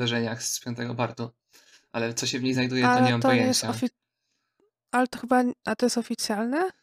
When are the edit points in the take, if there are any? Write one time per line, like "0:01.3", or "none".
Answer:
none